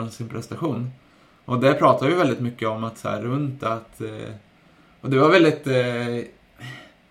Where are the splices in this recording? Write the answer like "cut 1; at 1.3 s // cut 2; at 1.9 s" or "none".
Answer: none